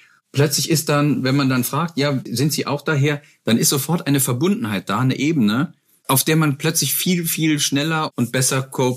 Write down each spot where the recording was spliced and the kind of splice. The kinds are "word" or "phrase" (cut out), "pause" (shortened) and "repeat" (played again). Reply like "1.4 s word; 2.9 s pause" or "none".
none